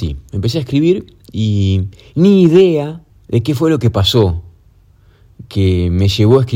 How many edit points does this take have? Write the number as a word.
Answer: zero